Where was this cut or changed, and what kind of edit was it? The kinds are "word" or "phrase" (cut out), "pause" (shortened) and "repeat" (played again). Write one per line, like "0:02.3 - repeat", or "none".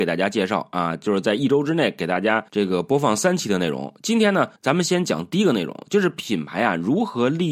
0:02.5 - pause
0:04.6 - pause